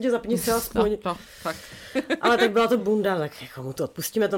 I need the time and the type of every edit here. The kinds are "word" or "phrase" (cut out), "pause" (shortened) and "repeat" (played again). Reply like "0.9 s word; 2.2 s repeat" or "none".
2.8 s word

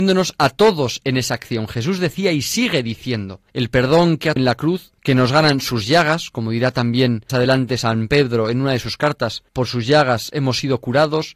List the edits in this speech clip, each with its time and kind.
3.5 s pause; 4.4 s word; 5.0 s pause; 7.3 s word; 9.5 s pause

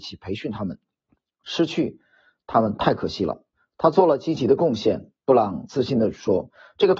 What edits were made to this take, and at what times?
5.1 s pause

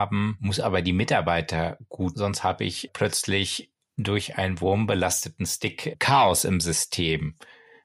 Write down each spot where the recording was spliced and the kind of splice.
2.1 s word

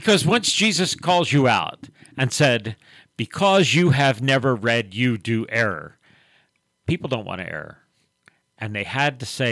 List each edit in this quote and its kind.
none

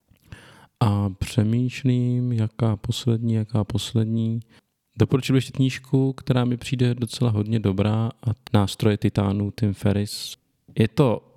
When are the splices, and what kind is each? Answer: 5.5 s word; 8.5 s word

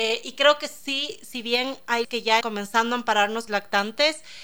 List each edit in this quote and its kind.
2.0 s word; 2.4 s word; 3.5 s phrase

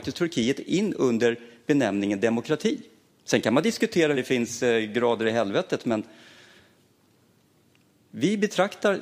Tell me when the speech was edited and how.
3.1 s pause; 4.1 s word

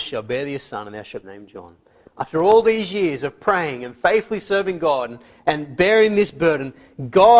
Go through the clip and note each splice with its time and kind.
1.2 s phrase

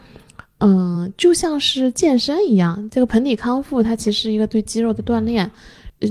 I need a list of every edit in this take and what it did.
none

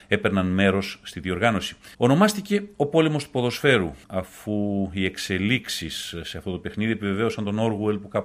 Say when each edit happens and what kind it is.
1.9 s pause; 4.0 s pause

